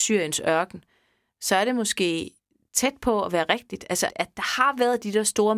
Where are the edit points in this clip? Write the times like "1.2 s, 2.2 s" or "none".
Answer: 4.1 s